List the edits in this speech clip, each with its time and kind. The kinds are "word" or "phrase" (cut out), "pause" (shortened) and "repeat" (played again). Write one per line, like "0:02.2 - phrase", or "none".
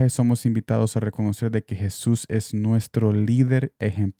none